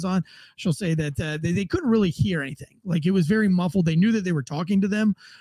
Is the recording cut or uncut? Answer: uncut